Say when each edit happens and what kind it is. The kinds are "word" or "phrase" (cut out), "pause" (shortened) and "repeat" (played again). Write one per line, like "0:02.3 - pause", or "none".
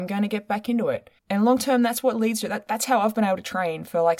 0:01.2 - pause